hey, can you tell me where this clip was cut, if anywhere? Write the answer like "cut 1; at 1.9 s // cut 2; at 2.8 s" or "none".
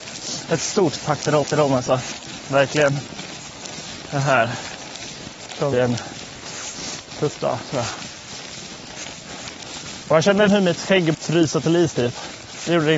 cut 1; at 1.4 s // cut 2; at 5.7 s // cut 3; at 10.5 s // cut 4; at 11.1 s

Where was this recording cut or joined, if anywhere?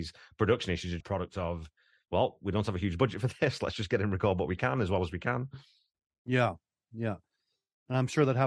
cut 1; at 1.0 s

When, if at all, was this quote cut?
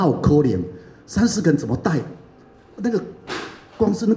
none

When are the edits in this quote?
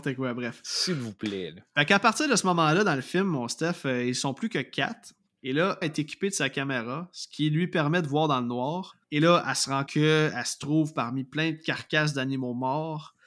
cut 1; at 5.3 s // cut 2; at 5.8 s // cut 3; at 9.0 s // cut 4; at 9.9 s

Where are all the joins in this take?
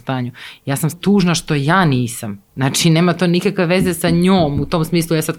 cut 1; at 0.9 s

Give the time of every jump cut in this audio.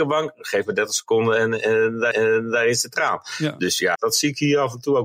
cut 1; at 2.1 s // cut 2; at 3.9 s

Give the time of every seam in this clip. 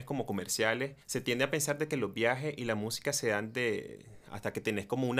cut 1; at 1.0 s

